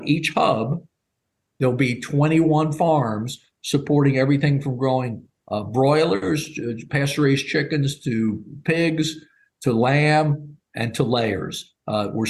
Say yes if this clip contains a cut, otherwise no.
no